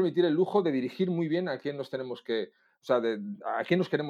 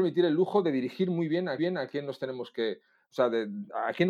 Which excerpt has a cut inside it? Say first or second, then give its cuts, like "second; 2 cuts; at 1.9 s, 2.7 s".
second; 1 cut; at 1.6 s